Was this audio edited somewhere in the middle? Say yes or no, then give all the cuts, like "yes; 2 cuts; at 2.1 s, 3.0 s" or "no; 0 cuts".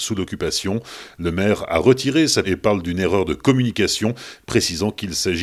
yes; 1 cut; at 2.4 s